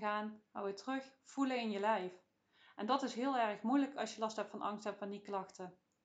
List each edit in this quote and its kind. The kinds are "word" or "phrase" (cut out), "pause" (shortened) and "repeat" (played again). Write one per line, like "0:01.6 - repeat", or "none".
none